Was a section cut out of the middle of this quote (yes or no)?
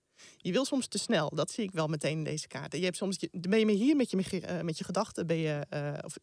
no